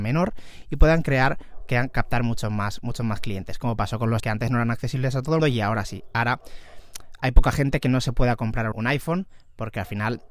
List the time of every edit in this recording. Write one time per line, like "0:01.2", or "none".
0:01.6
0:04.2
0:05.4
0:08.7